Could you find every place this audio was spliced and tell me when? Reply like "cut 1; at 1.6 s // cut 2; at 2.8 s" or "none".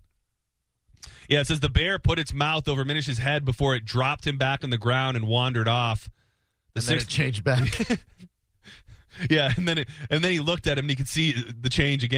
none